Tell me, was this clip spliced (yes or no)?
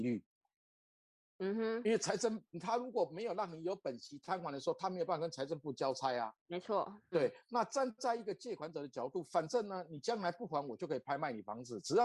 yes